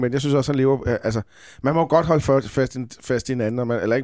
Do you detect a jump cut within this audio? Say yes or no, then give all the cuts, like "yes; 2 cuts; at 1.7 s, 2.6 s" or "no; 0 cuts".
no; 0 cuts